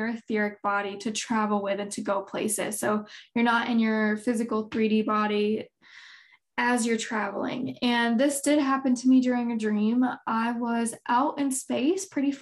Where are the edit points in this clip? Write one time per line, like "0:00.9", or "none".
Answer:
none